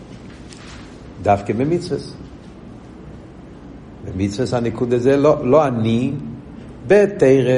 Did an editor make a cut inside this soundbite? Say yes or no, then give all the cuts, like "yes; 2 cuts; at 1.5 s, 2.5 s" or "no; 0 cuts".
no; 0 cuts